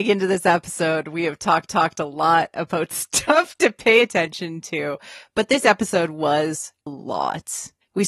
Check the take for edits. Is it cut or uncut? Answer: cut